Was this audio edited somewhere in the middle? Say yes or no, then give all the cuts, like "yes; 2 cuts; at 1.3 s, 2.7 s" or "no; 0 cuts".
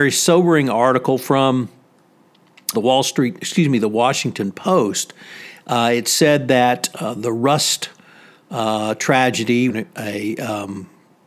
yes; 3 cuts; at 2.7 s, 6.9 s, 9.7 s